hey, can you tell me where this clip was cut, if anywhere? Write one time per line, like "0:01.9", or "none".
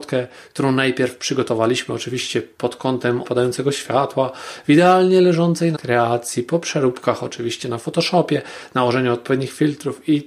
0:03.2
0:05.7